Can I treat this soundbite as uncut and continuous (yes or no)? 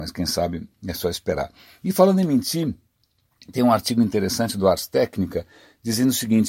yes